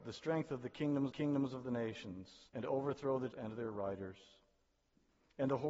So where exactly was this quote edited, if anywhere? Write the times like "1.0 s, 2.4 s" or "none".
1.1 s, 2.5 s, 3.3 s